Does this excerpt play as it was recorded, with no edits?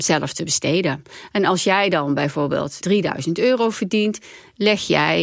yes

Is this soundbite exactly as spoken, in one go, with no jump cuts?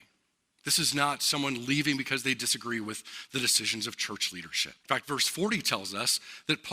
no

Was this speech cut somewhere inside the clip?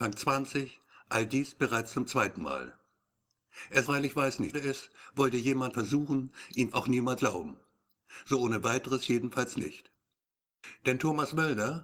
yes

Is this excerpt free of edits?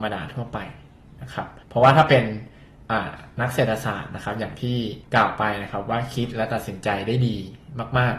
no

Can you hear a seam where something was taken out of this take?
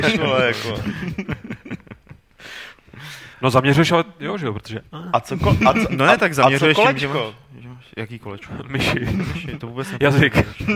yes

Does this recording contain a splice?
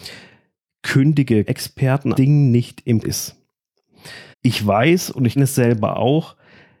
yes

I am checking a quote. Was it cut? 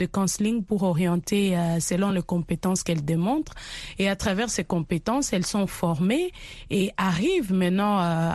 no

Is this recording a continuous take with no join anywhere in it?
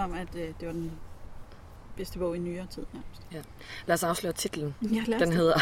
yes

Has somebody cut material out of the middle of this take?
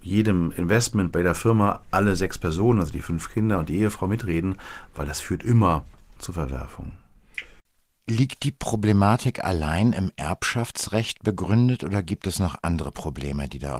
no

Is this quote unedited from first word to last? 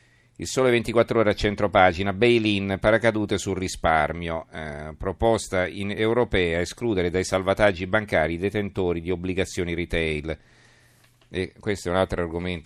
yes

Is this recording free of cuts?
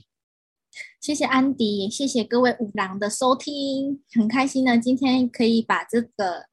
no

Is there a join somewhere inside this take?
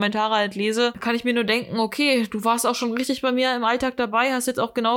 no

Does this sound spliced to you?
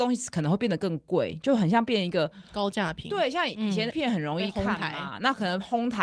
yes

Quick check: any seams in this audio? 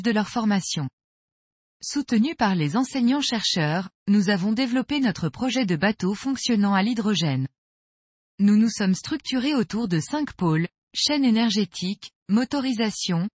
no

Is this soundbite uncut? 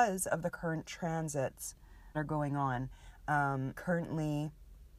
no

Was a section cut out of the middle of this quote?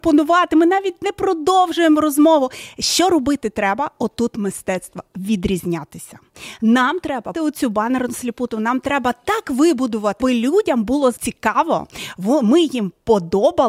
yes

